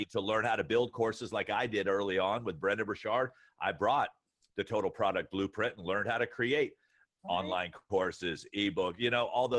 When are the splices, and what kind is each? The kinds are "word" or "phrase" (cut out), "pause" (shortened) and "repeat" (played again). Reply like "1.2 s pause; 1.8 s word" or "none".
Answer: none